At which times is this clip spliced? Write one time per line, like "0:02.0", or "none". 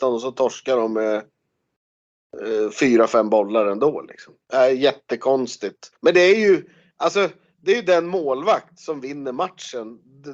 0:04.4
0:05.9